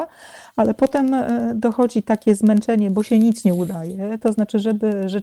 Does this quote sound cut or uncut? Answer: uncut